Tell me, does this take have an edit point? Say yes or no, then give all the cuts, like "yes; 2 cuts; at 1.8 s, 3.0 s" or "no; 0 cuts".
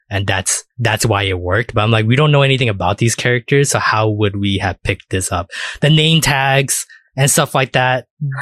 no; 0 cuts